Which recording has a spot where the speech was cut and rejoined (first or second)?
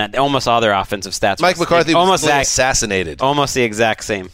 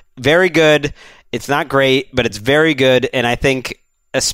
first